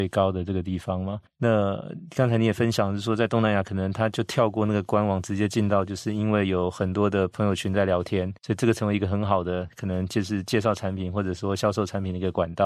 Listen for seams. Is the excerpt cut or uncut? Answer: cut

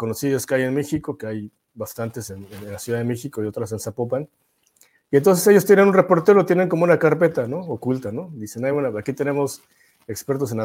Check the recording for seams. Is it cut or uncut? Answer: uncut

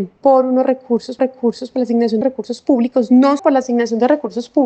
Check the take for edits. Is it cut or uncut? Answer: cut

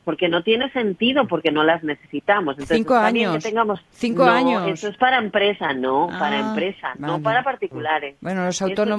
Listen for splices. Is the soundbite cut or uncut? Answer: cut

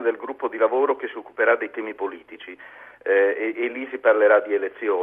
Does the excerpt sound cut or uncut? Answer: uncut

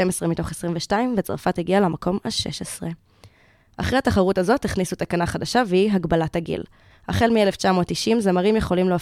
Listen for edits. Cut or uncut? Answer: uncut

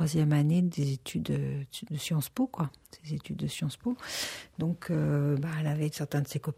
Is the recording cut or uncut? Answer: uncut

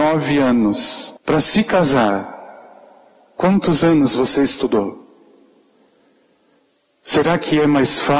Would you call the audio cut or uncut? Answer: cut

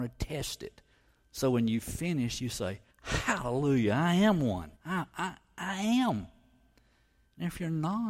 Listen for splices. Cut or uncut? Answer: cut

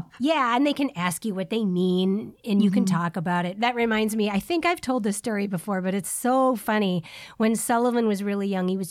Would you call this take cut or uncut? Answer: uncut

